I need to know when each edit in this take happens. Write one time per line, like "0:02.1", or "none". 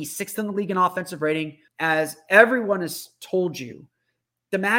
0:01.7